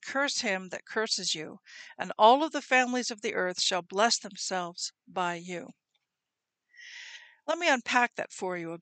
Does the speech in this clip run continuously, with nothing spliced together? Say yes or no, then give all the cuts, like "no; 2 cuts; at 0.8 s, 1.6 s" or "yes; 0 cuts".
yes; 0 cuts